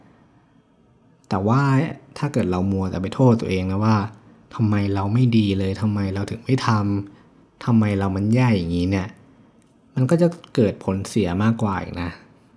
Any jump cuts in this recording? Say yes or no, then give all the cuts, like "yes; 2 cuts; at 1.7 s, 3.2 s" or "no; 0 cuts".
no; 0 cuts